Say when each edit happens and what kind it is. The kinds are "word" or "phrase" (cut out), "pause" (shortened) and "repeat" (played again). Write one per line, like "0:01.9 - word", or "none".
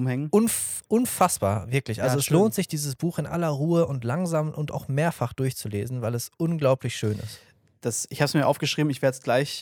none